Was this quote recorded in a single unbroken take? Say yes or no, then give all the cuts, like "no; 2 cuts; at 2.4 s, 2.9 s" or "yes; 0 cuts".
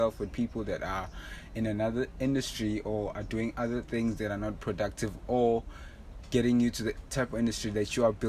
yes; 0 cuts